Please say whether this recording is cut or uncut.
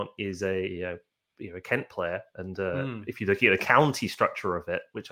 uncut